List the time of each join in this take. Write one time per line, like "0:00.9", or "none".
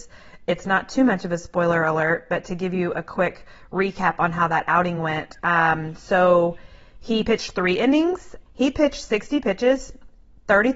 none